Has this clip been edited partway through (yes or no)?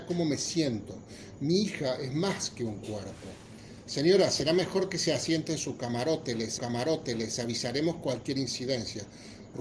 yes